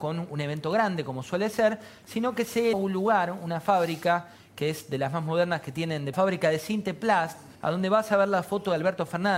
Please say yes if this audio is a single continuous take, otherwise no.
no